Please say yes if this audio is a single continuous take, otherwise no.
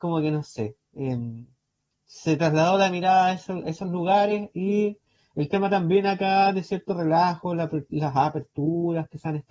yes